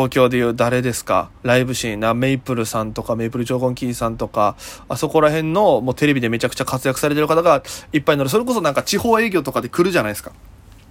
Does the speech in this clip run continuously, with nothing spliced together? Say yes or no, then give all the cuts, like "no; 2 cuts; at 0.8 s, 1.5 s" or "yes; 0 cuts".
no; 1 cut; at 1.4 s